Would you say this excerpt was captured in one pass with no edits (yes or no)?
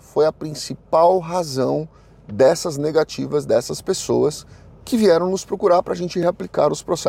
yes